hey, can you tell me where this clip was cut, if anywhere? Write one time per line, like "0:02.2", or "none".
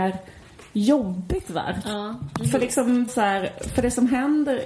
0:03.1